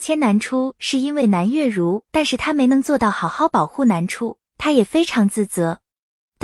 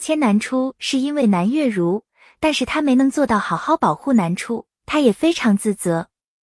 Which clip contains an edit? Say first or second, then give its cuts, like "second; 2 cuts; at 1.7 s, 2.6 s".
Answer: first; 1 cut; at 2.1 s